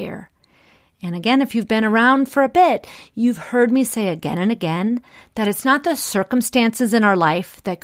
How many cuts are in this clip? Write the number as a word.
zero